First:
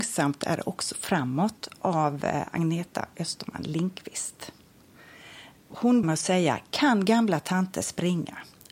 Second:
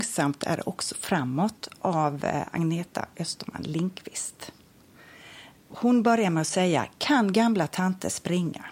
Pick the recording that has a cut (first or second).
first